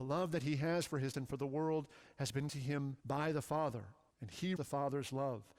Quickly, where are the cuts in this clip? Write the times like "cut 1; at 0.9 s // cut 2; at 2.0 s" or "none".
cut 1; at 1.1 s // cut 2; at 2.5 s // cut 3; at 3.0 s // cut 4; at 4.1 s // cut 5; at 4.6 s